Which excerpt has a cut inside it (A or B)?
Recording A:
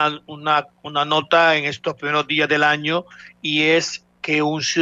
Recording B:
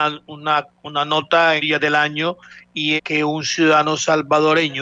B